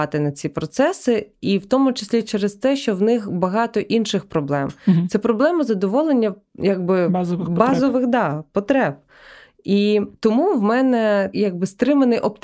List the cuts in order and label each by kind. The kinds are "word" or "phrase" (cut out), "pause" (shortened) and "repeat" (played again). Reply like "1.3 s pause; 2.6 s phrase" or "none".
none